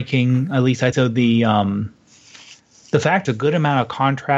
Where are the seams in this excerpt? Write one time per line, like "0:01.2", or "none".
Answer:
0:00.9
0:03.2